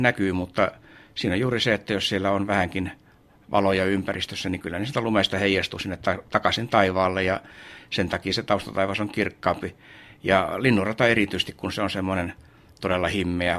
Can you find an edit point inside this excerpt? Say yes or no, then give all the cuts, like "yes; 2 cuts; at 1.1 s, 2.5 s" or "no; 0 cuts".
no; 0 cuts